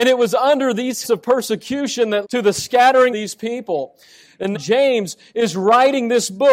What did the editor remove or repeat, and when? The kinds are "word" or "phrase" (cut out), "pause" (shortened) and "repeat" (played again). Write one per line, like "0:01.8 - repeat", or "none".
0:01.0 - word
0:02.2 - word
0:03.1 - phrase
0:04.5 - word